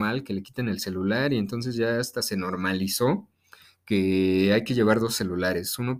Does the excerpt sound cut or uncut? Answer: uncut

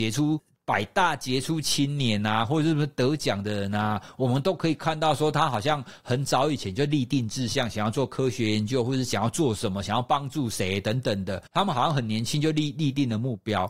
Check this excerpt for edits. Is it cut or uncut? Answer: cut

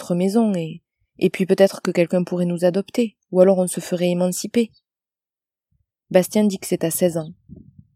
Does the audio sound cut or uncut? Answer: uncut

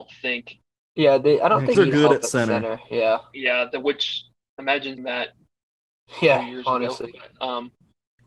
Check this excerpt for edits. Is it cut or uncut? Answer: cut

